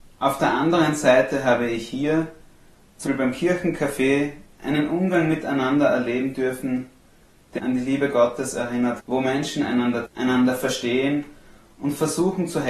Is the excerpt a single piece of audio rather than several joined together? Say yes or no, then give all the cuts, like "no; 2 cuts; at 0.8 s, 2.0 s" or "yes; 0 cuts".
no; 4 cuts; at 3.1 s, 7.6 s, 9.0 s, 10.1 s